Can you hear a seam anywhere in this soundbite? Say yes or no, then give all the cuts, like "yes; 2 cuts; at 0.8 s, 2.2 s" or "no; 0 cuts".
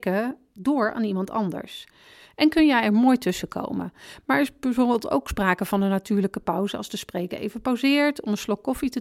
no; 0 cuts